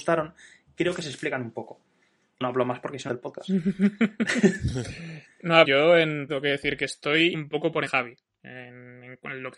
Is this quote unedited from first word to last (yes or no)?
no